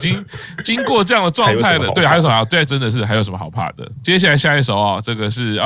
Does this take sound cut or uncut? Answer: cut